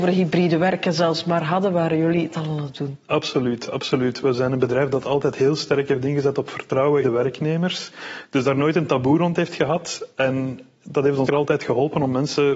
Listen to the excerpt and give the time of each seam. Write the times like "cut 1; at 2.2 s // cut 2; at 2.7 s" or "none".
cut 1; at 7.0 s // cut 2; at 11.3 s